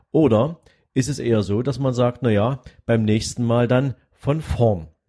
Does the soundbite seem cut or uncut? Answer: uncut